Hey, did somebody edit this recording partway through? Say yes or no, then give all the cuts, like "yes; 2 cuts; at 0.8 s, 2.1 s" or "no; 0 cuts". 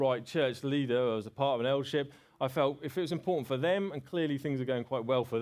no; 0 cuts